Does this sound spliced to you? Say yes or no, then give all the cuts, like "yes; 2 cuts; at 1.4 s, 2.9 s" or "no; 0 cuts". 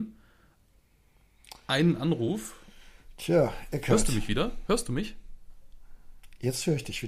no; 0 cuts